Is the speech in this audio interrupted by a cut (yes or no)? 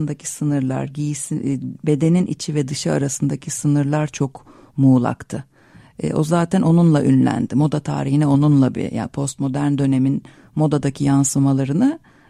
no